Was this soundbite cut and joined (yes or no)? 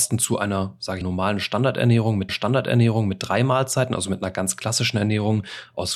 yes